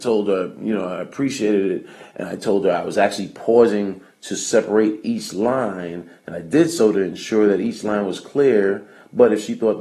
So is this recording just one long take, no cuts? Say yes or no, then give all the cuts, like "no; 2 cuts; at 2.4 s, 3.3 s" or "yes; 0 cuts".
yes; 0 cuts